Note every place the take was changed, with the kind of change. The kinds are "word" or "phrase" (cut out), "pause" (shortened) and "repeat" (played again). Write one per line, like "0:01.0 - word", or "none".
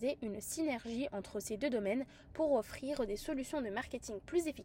none